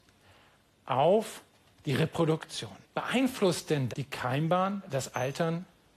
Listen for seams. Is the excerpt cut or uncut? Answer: cut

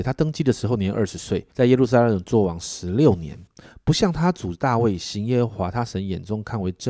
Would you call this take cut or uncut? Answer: cut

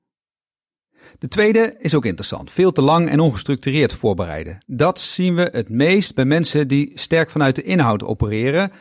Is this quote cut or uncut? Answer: uncut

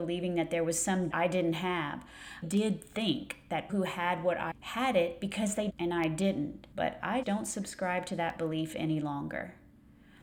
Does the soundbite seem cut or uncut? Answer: cut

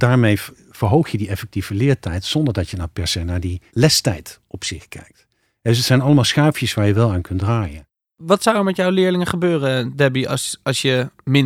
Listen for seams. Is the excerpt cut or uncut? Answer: uncut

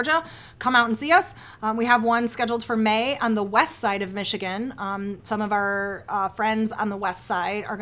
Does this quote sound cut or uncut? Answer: uncut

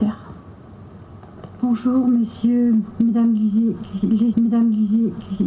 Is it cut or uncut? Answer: cut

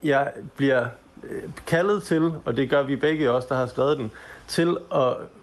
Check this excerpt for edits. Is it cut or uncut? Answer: uncut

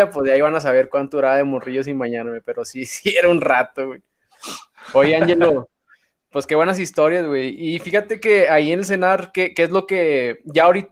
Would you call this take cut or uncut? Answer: uncut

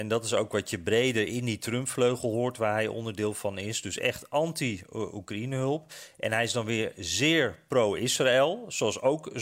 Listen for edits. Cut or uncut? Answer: uncut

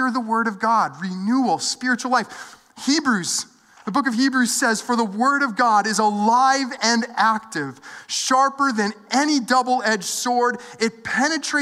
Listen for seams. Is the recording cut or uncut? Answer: uncut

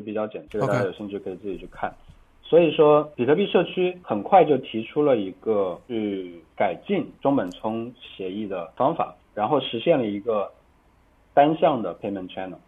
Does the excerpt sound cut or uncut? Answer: cut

